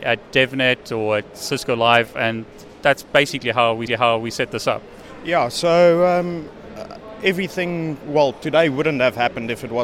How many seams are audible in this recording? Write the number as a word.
one